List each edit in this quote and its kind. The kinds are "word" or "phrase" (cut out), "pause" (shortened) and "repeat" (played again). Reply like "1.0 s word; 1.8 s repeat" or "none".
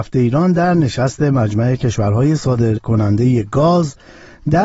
none